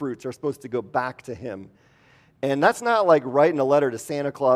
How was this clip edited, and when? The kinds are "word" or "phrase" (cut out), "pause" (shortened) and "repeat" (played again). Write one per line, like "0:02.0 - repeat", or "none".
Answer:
none